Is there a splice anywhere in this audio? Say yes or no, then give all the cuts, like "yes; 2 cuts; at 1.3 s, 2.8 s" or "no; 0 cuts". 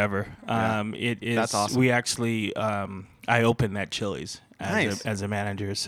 no; 0 cuts